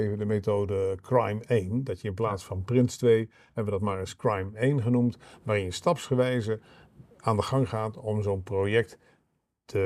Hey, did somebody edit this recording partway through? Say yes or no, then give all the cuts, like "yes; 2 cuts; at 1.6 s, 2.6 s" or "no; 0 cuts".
yes; 1 cut; at 7.1 s